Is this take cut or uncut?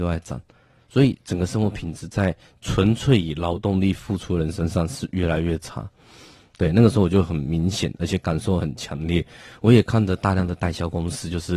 uncut